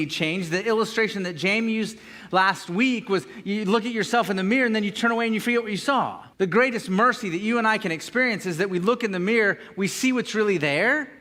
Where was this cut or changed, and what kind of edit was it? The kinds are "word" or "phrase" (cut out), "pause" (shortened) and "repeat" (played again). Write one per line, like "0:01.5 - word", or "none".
0:06.3 - pause